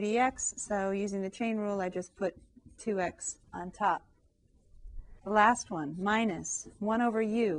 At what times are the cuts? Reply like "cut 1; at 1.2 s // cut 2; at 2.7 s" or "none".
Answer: cut 1; at 3.4 s // cut 2; at 5.2 s

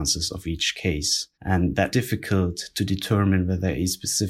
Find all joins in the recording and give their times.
cut 1; at 1.3 s // cut 2; at 1.9 s

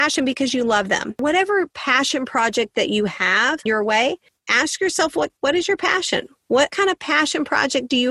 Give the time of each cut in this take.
cut 1; at 3.7 s // cut 2; at 5.4 s // cut 3; at 6.7 s

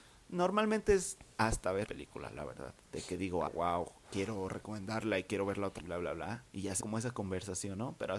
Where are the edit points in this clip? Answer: cut 1; at 1.9 s // cut 2; at 2.8 s // cut 3; at 3.5 s // cut 4; at 5.8 s // cut 5; at 6.5 s // cut 6; at 6.8 s

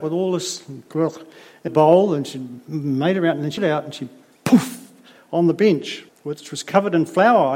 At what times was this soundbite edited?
cut 1; at 1.7 s // cut 2; at 3.6 s // cut 3; at 6.1 s

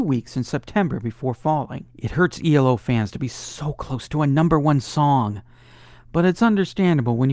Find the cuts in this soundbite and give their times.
cut 1; at 1.9 s

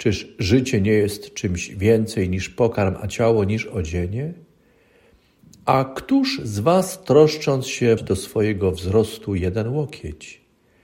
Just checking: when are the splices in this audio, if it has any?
cut 1; at 8.0 s

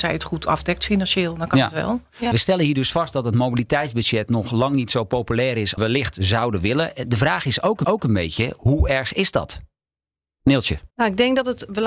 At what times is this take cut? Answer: cut 1; at 2.3 s // cut 2; at 5.8 s // cut 3; at 7.8 s // cut 4; at 10.9 s

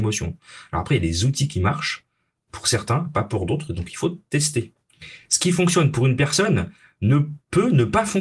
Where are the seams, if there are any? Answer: none

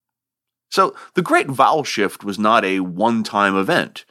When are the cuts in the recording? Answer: none

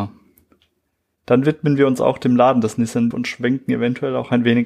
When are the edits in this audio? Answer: cut 1; at 3.1 s

